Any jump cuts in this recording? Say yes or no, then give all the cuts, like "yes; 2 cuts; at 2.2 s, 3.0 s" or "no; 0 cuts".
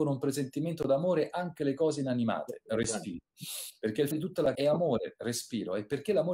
yes; 2 cuts; at 4.1 s, 4.5 s